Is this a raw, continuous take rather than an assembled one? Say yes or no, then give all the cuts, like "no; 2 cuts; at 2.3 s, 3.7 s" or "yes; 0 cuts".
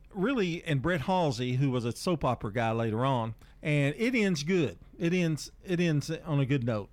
no; 1 cut; at 3.5 s